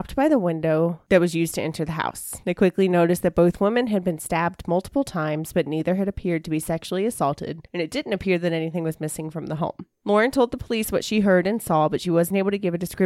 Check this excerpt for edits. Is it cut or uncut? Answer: cut